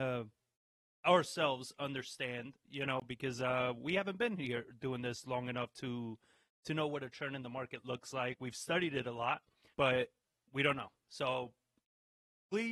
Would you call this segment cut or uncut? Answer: cut